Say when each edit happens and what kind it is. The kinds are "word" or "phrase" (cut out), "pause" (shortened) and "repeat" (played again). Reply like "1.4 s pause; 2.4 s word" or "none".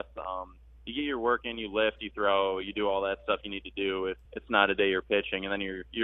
4.3 s pause